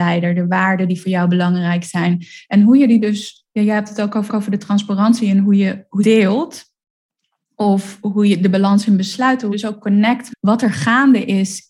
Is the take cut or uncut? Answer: cut